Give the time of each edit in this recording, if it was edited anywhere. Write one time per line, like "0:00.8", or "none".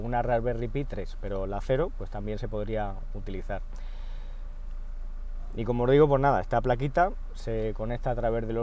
none